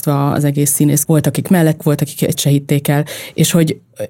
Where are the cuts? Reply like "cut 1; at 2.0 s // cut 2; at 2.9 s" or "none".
cut 1; at 1.0 s // cut 2; at 1.8 s // cut 3; at 2.3 s